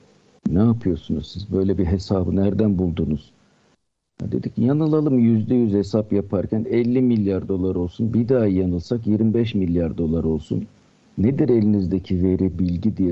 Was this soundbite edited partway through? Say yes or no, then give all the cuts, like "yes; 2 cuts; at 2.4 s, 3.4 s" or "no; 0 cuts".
yes; 1 cut; at 10.9 s